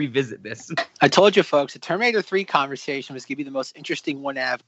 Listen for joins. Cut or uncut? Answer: cut